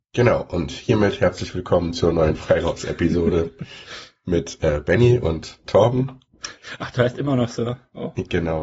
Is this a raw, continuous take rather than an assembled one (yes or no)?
yes